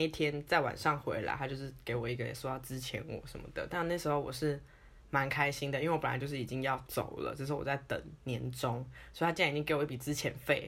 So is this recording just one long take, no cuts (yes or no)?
yes